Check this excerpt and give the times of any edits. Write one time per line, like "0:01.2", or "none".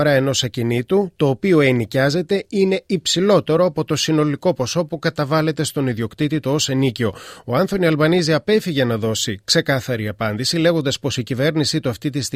none